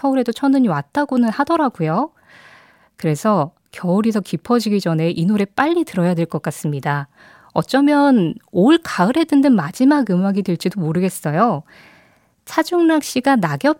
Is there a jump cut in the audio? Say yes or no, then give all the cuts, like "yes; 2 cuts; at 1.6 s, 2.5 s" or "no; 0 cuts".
no; 0 cuts